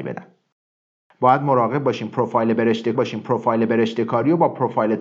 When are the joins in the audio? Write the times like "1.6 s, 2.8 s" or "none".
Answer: 2.9 s